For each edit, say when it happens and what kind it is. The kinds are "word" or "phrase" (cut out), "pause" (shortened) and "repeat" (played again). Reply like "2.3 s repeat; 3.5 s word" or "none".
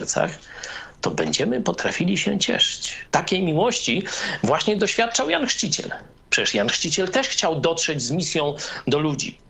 3.1 s pause